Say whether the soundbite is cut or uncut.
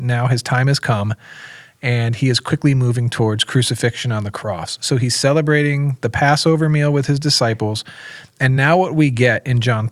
uncut